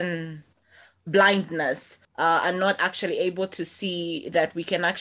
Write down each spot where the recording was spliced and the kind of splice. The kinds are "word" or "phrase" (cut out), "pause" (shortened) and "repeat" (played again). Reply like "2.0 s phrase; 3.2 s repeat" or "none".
2.0 s pause